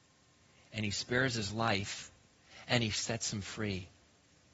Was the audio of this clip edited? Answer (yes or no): no